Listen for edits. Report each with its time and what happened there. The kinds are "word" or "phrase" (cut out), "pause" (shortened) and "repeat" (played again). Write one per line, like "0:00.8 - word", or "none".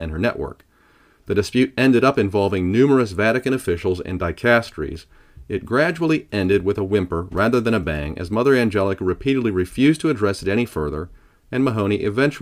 none